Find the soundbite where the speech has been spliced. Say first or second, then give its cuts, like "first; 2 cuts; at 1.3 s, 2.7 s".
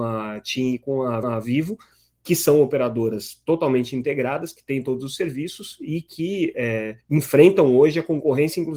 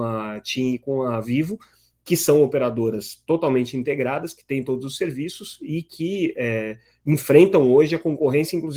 first; 2 cuts; at 1.2 s, 7.0 s